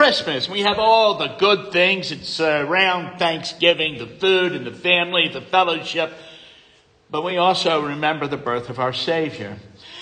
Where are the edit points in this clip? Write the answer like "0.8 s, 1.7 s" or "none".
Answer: none